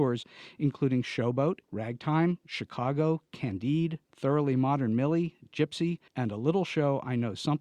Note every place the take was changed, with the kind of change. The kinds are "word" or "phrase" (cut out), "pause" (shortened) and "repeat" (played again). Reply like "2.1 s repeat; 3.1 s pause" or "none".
1.6 s pause; 4.0 s pause; 6.1 s pause